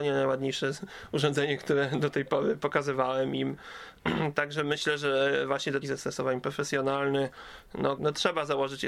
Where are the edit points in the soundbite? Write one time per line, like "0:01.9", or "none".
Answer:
0:05.8
0:08.0